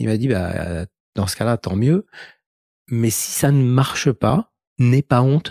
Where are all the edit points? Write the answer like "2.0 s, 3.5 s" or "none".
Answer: none